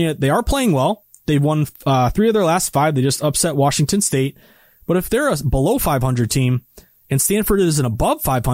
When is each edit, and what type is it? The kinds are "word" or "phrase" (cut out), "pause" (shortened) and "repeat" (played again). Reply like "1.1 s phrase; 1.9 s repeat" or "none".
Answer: none